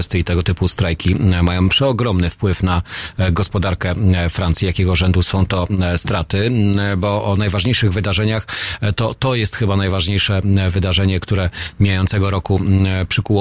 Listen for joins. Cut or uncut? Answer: uncut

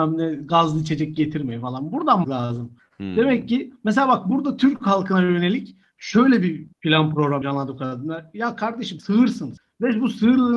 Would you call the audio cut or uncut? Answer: cut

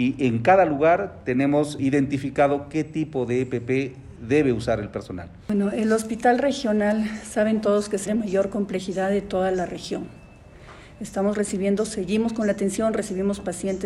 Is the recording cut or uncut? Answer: cut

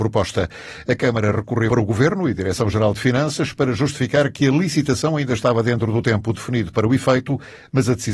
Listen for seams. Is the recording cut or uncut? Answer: cut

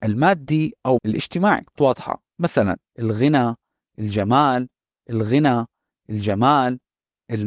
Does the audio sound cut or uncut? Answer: cut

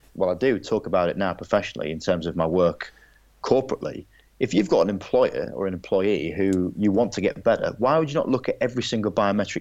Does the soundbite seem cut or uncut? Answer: uncut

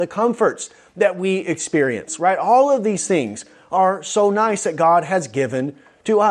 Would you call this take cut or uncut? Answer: uncut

